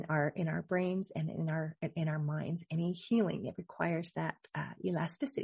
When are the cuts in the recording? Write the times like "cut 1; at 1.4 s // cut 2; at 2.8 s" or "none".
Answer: none